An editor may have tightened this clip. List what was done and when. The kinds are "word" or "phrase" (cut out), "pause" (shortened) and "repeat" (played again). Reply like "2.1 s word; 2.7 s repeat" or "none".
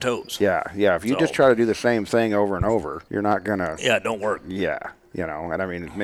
3.1 s pause